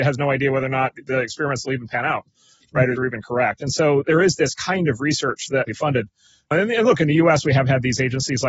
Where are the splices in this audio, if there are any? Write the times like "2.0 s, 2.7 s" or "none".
3.0 s, 5.7 s